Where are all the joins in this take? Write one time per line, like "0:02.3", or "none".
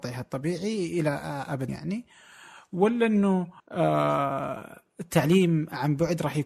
0:01.7
0:03.6